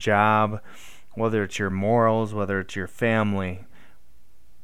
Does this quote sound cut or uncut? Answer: uncut